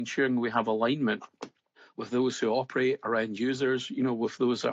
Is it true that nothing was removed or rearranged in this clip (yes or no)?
no